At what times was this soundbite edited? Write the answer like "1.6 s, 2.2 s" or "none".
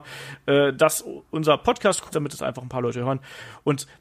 2.1 s